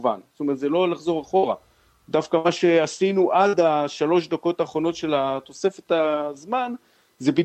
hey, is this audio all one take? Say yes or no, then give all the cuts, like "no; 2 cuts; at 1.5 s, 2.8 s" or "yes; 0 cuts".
yes; 0 cuts